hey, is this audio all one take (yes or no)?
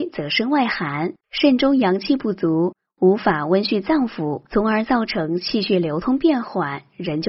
no